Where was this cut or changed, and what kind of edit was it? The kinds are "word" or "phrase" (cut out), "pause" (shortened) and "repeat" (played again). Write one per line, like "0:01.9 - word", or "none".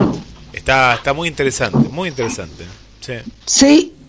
none